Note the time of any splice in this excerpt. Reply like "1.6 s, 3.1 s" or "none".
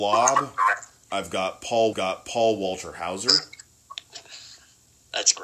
1.9 s